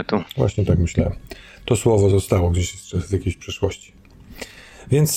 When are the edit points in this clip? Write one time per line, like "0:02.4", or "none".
none